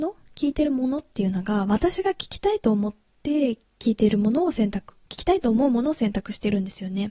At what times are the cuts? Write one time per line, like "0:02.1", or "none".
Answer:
0:05.0